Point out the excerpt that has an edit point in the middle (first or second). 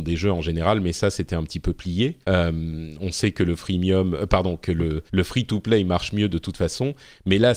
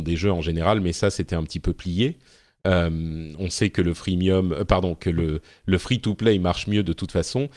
first